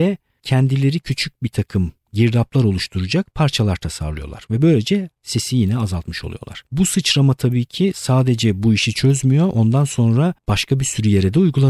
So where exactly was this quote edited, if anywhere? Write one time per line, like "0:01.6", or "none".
0:05.1
0:06.7
0:10.4